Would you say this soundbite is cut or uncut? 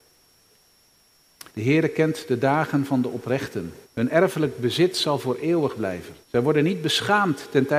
cut